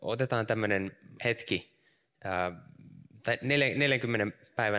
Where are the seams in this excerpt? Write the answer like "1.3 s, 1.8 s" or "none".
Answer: 1.2 s